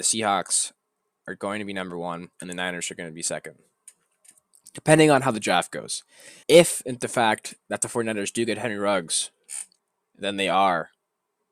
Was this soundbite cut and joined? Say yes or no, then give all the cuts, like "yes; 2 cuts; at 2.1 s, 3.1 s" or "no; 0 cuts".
yes; 3 cuts; at 2.3 s, 6.4 s, 9.8 s